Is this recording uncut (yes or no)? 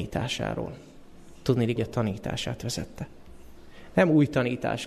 no